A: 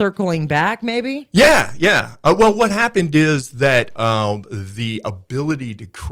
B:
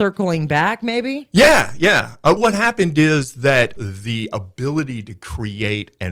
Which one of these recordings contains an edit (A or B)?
B